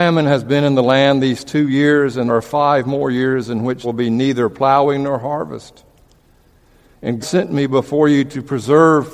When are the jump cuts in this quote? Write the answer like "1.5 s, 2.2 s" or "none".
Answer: 2.3 s, 3.8 s, 7.2 s